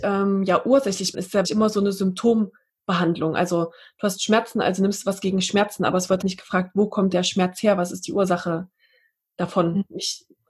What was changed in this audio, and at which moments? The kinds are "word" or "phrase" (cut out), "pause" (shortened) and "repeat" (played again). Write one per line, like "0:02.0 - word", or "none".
0:01.1 - word
0:01.4 - word
0:06.2 - word
0:07.1 - word